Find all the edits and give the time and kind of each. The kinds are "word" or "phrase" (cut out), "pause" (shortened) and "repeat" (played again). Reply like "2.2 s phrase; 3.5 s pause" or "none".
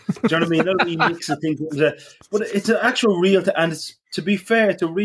none